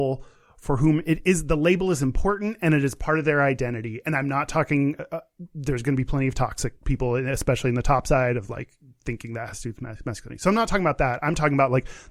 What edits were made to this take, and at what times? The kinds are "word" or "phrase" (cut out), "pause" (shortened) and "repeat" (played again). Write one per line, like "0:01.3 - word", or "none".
0:06.8 - pause